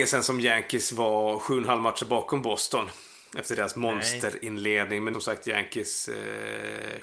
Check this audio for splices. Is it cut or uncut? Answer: cut